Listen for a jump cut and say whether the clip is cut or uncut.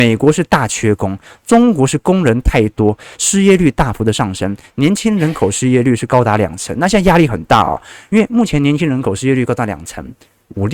uncut